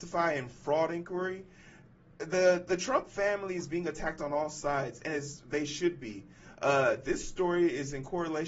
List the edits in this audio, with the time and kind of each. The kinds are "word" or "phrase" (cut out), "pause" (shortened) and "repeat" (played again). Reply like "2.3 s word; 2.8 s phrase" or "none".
none